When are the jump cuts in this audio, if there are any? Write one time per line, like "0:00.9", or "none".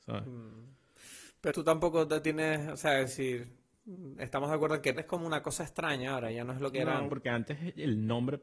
0:01.5
0:05.0
0:07.1